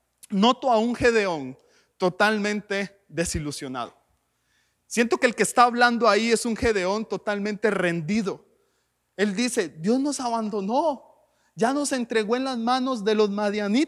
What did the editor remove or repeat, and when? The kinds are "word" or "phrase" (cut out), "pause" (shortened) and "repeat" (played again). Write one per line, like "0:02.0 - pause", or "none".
none